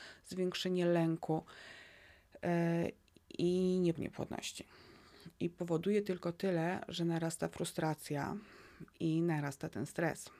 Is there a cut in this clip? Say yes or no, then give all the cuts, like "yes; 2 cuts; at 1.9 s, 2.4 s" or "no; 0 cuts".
yes; 2 cuts; at 4.0 s, 8.9 s